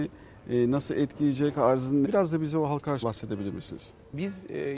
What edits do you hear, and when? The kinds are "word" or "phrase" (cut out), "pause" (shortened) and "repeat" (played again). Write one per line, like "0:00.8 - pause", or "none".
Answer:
0:01.6 - word
0:02.0 - word
0:03.0 - word